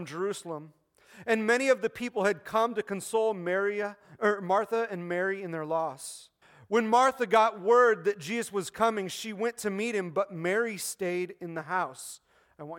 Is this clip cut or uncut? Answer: cut